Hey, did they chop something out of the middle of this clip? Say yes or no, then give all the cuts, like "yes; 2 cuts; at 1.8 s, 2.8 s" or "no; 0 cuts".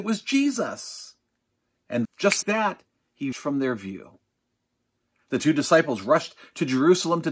yes; 3 cuts; at 2.0 s, 2.4 s, 3.3 s